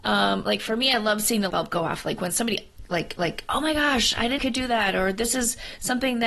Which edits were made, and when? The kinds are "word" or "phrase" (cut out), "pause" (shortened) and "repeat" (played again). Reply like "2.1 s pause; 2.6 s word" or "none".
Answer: 1.5 s word; 3.2 s repeat; 4.4 s phrase